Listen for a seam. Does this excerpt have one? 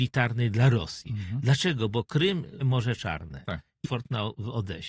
yes; 2 cuts; at 2.6 s, 3.8 s

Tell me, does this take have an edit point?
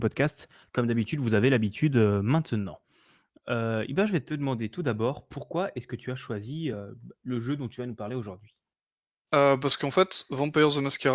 no; 0 cuts

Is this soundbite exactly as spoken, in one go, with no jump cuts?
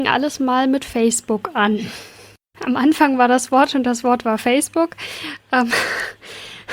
yes; 0 cuts

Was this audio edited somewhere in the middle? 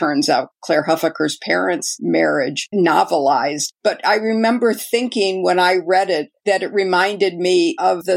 no; 0 cuts

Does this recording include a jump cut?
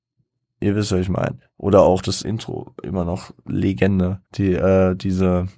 yes; 2 cuts; at 2.2 s, 4.2 s

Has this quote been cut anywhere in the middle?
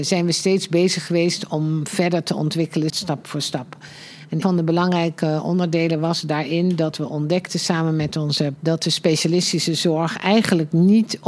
yes; 3 cuts; at 2.9 s, 4.4 s, 8.6 s

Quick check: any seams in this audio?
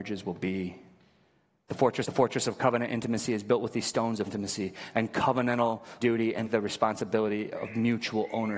yes; 4 cuts; at 2.0 s, 4.3 s, 6.0 s, 6.4 s

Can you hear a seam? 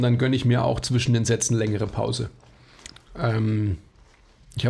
no; 0 cuts

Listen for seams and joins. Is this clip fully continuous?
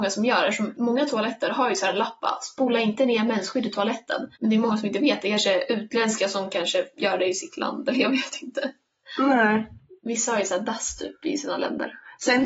yes; 0 cuts

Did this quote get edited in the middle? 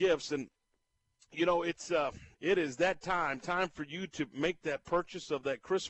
yes; 1 cut; at 2.3 s

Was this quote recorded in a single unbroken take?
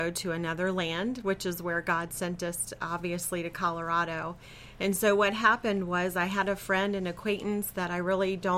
yes; 0 cuts

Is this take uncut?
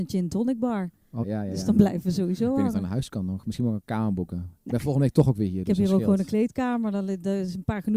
no; 2 cuts; at 1.2 s, 4.6 s

